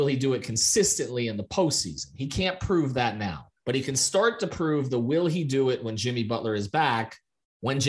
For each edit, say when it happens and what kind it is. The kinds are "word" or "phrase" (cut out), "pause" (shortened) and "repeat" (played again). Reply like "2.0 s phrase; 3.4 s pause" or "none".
3.6 s pause